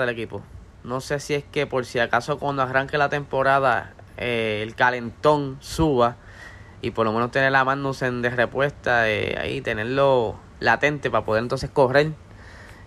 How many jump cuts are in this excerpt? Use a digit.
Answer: 1